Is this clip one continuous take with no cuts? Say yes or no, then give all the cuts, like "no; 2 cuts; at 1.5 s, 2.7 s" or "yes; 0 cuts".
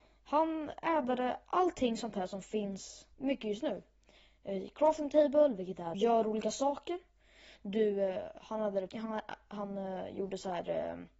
no; 3 cuts; at 3.1 s, 5.9 s, 8.9 s